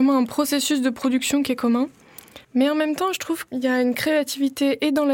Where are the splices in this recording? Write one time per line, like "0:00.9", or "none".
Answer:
0:02.4
0:03.5